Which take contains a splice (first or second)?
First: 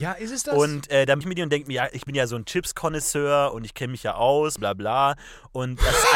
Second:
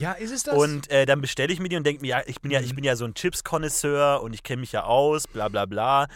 first